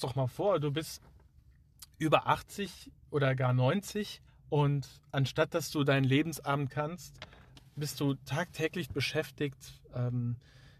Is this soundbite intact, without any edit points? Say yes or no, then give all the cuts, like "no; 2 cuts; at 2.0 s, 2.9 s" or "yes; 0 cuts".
no; 4 cuts; at 4.3 s, 6.7 s, 7.6 s, 8.9 s